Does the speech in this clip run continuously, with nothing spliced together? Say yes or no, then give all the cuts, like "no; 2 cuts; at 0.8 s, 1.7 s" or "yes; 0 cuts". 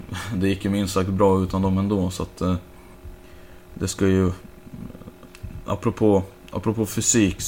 yes; 0 cuts